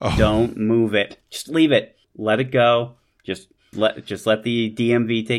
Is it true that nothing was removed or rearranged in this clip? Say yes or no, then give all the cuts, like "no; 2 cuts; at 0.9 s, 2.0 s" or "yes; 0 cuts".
no; 3 cuts; at 1.2 s, 2.0 s, 3.7 s